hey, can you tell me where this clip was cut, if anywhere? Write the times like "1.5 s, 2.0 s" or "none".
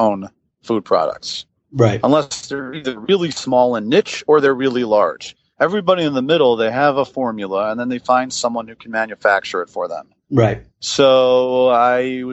none